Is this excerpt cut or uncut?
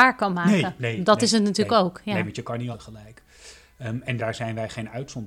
cut